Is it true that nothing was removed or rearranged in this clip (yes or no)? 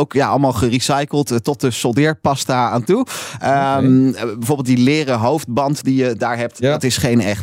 yes